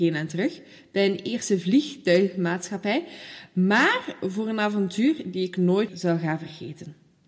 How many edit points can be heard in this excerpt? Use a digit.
1